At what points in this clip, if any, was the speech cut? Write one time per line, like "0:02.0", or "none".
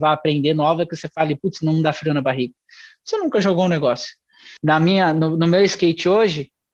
0:04.6